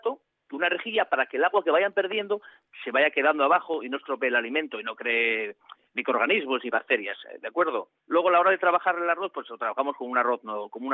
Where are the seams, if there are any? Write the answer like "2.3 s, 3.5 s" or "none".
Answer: 8.0 s

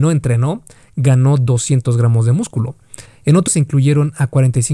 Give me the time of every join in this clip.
3.1 s, 3.5 s

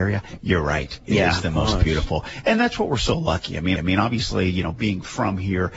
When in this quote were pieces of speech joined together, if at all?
3.8 s

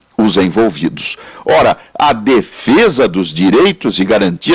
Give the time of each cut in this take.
none

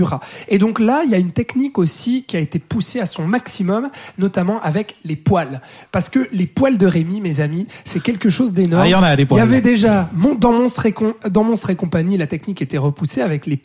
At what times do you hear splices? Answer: none

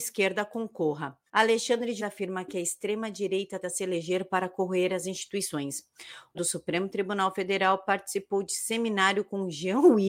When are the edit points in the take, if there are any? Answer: 1.3 s, 2.0 s, 3.6 s, 6.3 s

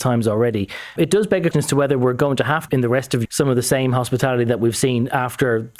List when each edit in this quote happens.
1.0 s, 1.5 s, 2.7 s, 3.3 s

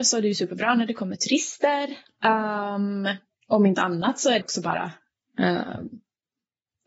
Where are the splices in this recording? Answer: 4.4 s

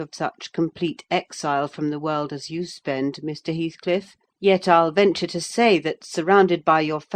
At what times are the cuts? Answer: 4.3 s

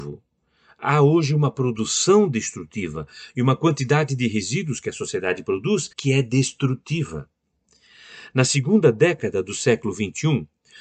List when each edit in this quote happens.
5.9 s

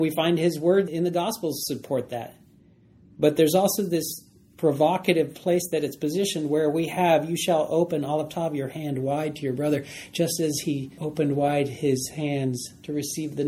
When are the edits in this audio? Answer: none

